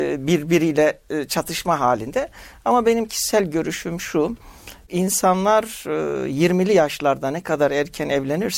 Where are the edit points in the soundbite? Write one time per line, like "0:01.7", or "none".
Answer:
none